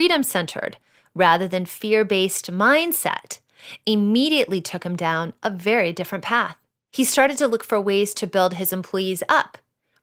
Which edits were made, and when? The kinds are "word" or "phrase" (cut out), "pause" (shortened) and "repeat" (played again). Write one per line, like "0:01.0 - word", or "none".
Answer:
none